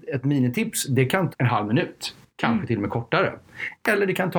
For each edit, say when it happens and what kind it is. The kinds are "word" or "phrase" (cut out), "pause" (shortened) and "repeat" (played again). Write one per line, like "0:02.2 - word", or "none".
0:01.3 - word